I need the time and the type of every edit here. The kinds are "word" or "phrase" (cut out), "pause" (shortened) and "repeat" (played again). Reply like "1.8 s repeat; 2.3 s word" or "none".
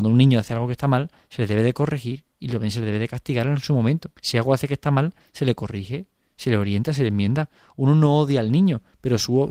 4.2 s pause